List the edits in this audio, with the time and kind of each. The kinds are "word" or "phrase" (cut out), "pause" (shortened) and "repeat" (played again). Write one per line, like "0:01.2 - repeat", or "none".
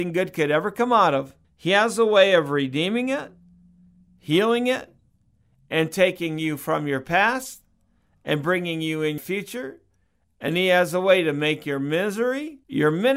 0:01.4 - pause
0:09.2 - word